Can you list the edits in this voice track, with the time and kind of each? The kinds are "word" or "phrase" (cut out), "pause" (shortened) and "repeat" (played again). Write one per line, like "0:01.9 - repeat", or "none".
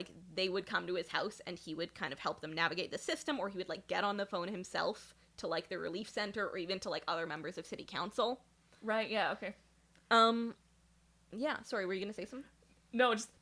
none